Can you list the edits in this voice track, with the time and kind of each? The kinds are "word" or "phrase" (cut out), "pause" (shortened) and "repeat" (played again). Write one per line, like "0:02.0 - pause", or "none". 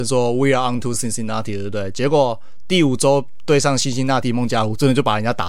none